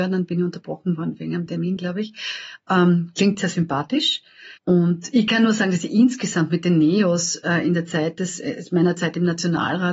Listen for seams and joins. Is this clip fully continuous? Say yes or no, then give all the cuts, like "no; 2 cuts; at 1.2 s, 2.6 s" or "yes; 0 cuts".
no; 1 cut; at 4.6 s